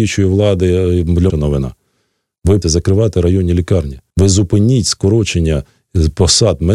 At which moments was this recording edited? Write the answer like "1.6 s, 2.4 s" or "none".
1.3 s, 2.6 s, 4.1 s